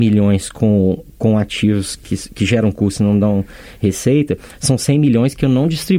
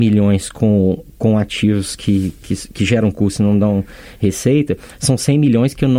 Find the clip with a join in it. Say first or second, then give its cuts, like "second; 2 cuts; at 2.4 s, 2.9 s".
first; 1 cut; at 2.0 s